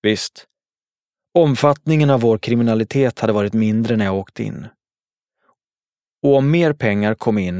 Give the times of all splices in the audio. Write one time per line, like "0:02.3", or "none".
none